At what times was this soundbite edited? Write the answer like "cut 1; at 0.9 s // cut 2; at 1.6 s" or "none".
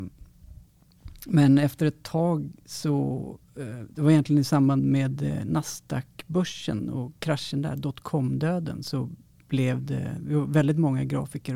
none